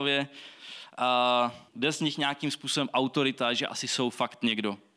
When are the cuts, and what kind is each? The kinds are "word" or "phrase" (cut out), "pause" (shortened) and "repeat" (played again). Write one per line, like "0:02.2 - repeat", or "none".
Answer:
0:01.7 - pause